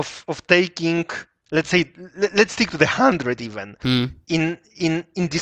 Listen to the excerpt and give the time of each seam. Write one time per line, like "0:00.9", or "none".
none